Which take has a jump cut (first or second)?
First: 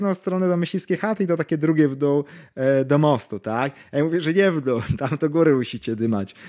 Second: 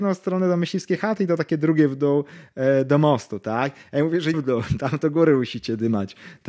second